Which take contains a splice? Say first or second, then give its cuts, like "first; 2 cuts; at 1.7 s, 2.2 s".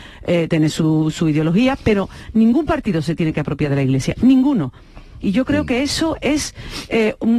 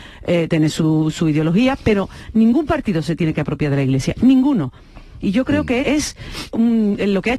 second; 2 cuts; at 5.8 s, 6.5 s